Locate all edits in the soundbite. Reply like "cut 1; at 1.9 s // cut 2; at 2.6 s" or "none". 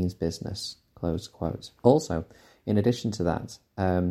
cut 1; at 1.8 s

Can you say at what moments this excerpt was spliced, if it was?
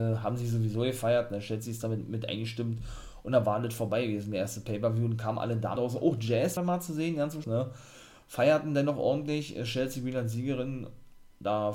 cut 1; at 5.8 s // cut 2; at 6.6 s // cut 3; at 7.4 s

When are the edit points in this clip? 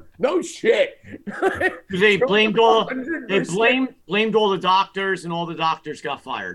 cut 1; at 4.0 s

